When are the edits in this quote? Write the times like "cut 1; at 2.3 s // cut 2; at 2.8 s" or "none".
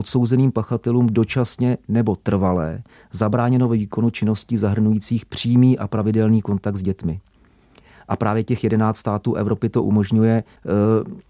none